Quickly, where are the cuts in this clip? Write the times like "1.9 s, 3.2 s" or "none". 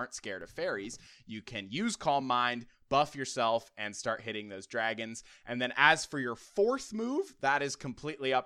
none